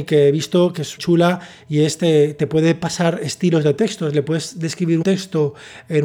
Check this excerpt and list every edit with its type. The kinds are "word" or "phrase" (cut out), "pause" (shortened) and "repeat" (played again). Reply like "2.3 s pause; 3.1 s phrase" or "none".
1.0 s word; 5.0 s word